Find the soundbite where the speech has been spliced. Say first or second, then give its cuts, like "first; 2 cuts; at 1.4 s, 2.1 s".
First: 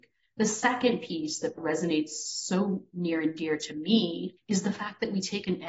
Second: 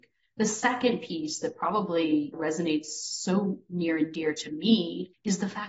first; 1 cut; at 1.5 s